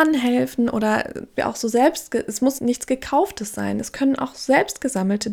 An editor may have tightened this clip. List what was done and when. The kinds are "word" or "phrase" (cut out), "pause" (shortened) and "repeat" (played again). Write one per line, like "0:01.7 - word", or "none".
0:01.4 - phrase
0:02.6 - word